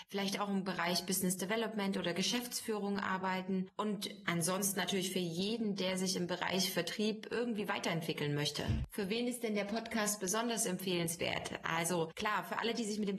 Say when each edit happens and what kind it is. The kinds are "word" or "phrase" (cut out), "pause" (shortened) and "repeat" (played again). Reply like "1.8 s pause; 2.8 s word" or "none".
none